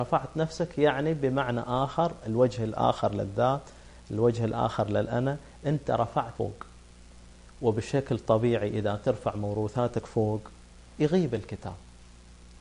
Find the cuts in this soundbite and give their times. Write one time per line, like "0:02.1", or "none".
0:06.4